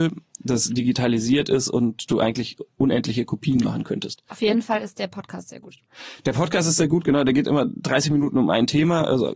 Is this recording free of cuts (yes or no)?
yes